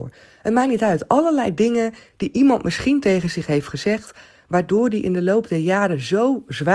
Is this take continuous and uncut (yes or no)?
yes